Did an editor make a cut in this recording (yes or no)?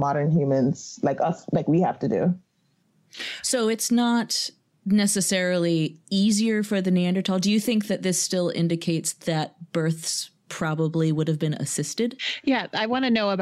no